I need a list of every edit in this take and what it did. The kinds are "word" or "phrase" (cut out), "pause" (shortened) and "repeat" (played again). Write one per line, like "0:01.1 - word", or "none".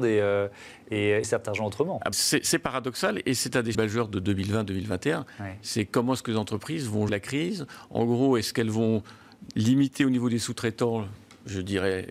0:01.2 - word
0:02.1 - word
0:03.7 - word
0:07.1 - word